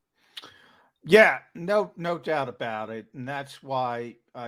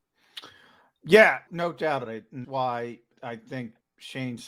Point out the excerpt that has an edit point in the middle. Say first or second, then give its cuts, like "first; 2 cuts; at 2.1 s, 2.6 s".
second; 4 cuts; at 1.5 s, 2.0 s, 2.4 s, 3.1 s